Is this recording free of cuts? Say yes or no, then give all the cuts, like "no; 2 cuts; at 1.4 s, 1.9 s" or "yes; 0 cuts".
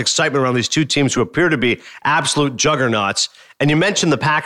yes; 0 cuts